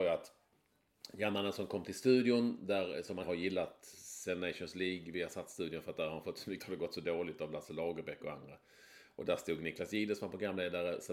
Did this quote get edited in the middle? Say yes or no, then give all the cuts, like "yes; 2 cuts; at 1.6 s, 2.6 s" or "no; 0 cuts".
yes; 3 cuts; at 3.2 s, 3.9 s, 6.6 s